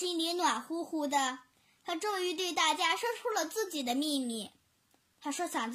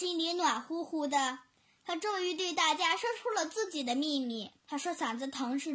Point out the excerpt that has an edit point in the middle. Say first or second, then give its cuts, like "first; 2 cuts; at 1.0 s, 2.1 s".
second; 1 cut; at 4.6 s